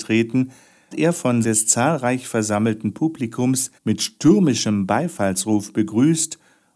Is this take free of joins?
no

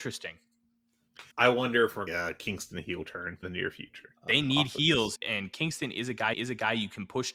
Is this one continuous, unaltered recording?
no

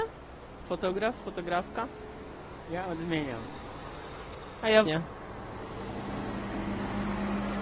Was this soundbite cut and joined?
yes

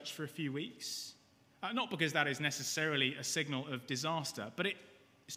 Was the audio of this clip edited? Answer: no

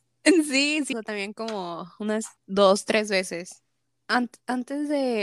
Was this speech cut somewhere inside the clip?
yes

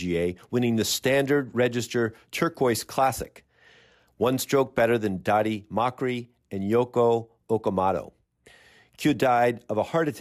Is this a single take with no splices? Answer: yes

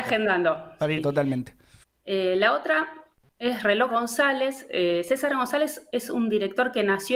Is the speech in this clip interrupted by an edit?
yes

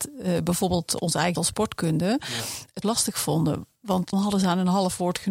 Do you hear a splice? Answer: yes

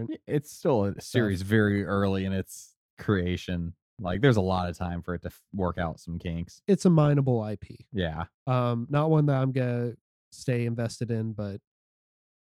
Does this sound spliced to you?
no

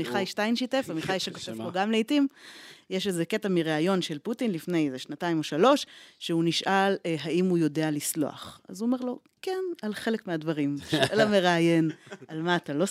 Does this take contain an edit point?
no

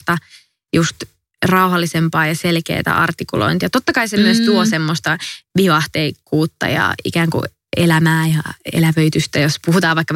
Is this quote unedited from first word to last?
yes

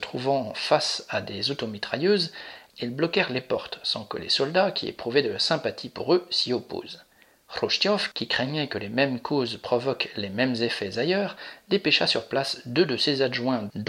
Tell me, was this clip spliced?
no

